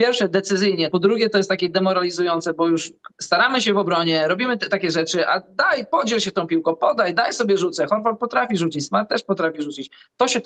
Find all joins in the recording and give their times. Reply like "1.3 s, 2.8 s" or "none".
0.9 s, 3.1 s